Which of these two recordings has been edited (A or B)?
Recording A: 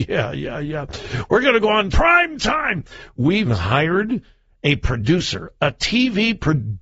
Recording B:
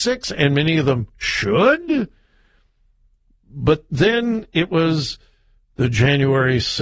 A